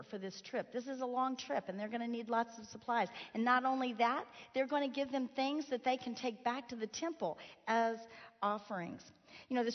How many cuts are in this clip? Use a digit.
0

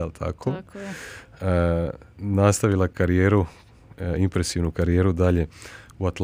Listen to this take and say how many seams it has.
0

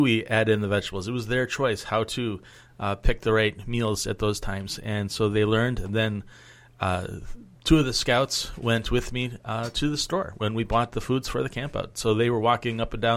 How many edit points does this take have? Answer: 0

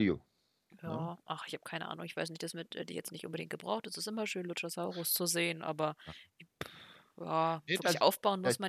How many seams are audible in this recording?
0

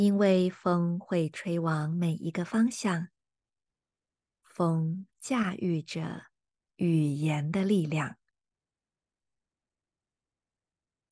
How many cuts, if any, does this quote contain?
0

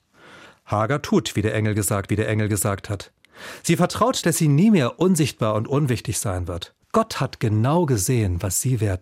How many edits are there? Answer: 3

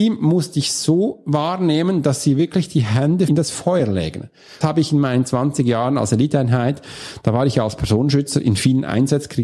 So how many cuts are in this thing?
2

